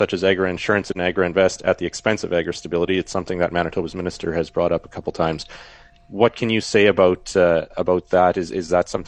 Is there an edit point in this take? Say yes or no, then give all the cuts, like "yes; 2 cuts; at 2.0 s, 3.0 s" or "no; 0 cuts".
no; 0 cuts